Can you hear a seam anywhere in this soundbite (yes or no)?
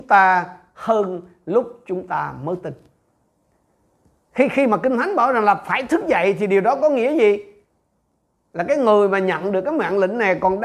no